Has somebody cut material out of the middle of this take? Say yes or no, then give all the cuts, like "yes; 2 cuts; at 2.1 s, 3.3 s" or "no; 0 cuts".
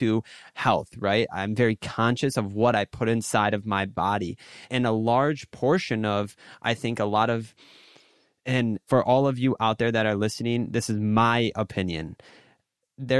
no; 0 cuts